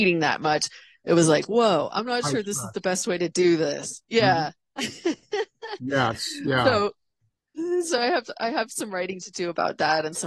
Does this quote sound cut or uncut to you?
uncut